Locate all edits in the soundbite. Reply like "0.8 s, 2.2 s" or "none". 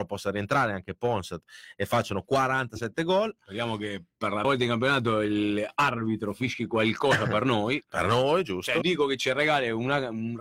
4.4 s, 8.8 s